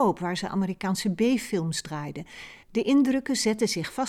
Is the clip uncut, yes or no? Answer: no